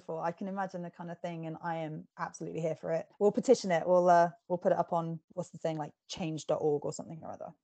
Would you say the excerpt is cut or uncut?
cut